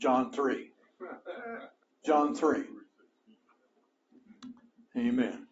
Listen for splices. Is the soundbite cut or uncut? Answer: cut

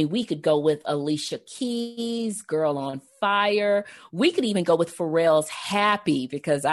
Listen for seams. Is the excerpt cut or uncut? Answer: uncut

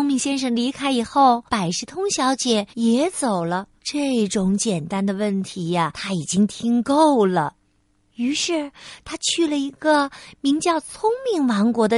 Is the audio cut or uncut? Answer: cut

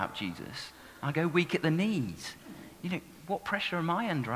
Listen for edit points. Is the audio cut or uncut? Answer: uncut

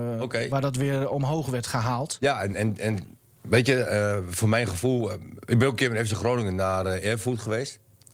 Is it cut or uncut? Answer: uncut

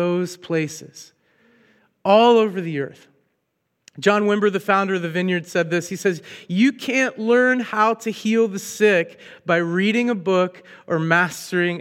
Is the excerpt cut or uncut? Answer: uncut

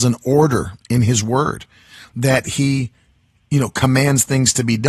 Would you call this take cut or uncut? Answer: uncut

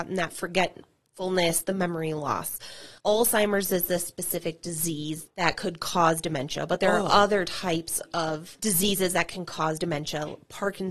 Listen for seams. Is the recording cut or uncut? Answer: cut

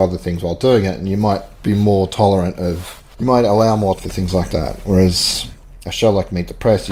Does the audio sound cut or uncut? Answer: cut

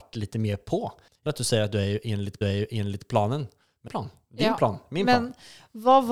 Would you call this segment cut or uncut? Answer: cut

